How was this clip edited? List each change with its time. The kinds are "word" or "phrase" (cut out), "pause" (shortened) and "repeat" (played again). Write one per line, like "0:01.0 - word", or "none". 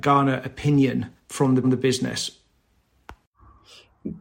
0:01.2 - pause
0:01.6 - repeat